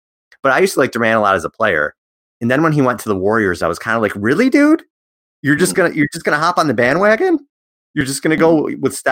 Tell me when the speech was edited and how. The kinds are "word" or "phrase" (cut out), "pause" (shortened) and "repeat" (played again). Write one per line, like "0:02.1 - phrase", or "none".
none